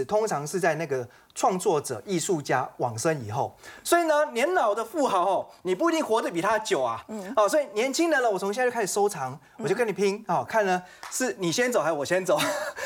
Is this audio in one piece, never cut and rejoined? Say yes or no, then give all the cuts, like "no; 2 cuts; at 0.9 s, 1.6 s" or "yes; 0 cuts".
yes; 0 cuts